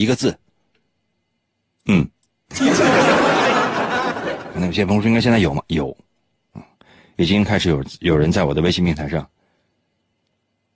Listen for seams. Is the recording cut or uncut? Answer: uncut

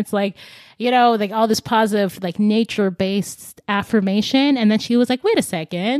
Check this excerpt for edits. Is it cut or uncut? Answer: uncut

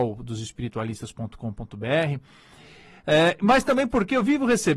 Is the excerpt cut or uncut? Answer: uncut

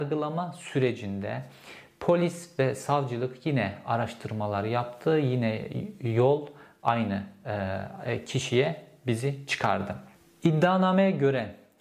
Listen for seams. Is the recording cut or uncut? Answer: uncut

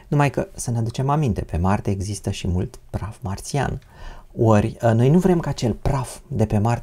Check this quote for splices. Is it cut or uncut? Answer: uncut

